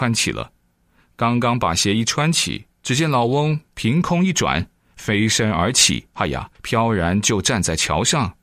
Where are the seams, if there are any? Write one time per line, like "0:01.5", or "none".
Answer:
0:02.7
0:06.1
0:06.6